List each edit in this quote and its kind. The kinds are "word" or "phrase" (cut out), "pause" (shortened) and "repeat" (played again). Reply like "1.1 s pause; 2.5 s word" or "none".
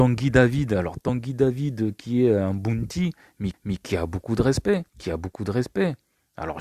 3.5 s repeat; 4.9 s pause